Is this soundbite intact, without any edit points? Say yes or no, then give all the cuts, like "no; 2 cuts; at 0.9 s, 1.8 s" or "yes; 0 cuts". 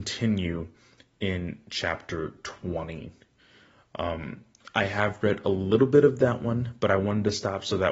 yes; 0 cuts